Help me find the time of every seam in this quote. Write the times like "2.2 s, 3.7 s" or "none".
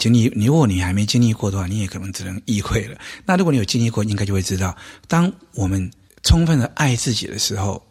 none

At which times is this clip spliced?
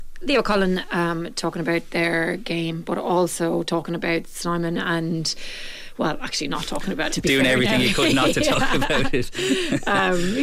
7.1 s

